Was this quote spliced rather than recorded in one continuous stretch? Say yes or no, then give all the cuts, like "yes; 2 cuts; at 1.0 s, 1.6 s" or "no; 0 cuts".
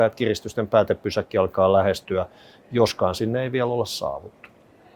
no; 0 cuts